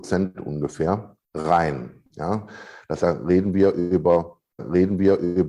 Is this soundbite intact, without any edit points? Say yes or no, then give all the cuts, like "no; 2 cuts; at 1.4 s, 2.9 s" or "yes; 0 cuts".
no; 3 cuts; at 1.2 s, 3.0 s, 4.6 s